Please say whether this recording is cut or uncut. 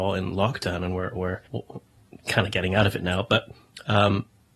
cut